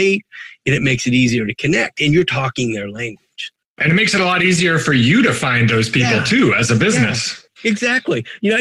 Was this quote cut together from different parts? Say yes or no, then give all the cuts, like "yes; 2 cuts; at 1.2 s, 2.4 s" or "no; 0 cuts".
no; 0 cuts